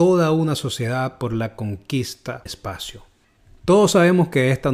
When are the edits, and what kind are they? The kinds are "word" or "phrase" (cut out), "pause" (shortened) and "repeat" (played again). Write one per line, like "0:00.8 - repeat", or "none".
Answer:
0:02.5 - word